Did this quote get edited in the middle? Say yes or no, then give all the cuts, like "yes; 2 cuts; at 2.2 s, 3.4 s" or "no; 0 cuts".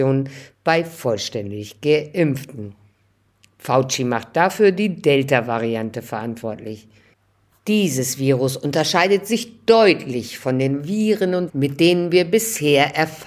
yes; 1 cut; at 11.5 s